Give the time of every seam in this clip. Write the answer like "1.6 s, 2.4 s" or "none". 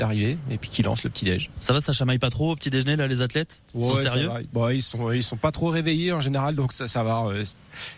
none